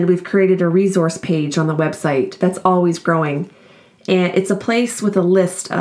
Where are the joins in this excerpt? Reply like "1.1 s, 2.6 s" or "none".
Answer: none